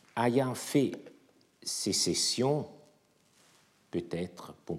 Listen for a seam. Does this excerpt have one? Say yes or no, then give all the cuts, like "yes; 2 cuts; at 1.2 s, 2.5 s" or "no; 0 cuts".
no; 0 cuts